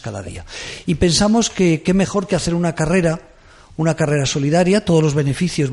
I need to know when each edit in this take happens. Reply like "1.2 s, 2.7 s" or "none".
none